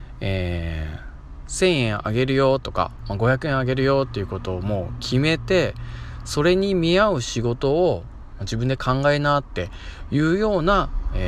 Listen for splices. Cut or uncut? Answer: uncut